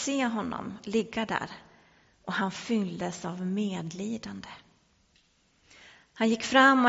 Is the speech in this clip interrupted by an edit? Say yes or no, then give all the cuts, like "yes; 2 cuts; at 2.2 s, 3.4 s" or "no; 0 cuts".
no; 0 cuts